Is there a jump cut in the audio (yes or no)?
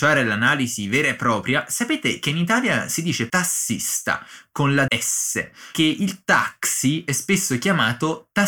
yes